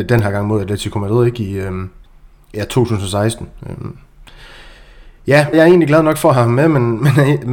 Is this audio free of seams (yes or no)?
no